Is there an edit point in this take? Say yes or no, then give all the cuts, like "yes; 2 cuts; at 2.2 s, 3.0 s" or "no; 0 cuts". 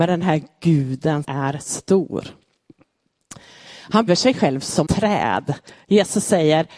yes; 4 cuts; at 1.2 s, 1.6 s, 4.1 s, 4.8 s